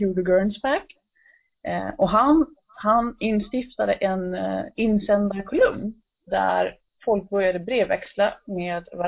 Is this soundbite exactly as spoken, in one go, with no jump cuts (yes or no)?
yes